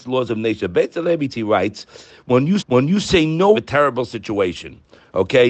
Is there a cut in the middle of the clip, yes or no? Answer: yes